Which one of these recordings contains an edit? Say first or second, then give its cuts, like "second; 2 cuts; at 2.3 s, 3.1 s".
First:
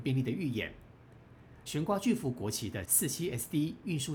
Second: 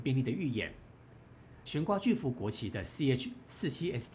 first; 1 cut; at 2.8 s